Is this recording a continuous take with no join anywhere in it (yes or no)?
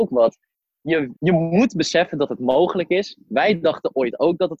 no